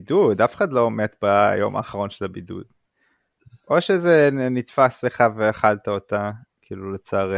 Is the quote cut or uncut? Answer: uncut